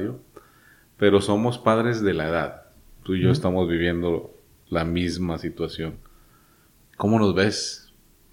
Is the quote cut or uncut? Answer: uncut